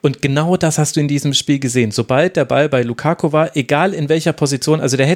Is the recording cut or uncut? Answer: uncut